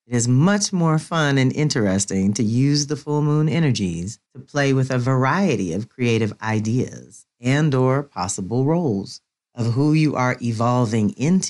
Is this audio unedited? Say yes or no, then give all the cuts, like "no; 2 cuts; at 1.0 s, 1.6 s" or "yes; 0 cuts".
yes; 0 cuts